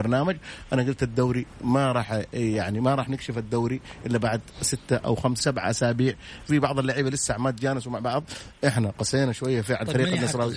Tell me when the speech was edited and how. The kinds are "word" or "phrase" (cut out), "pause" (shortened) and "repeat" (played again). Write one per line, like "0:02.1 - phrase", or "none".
0:05.4 - phrase
0:06.5 - phrase